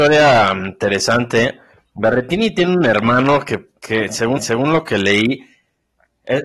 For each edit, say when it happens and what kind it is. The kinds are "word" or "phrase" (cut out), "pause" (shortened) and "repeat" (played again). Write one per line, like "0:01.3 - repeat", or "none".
0:01.7 - pause
0:03.8 - pause
0:04.4 - repeat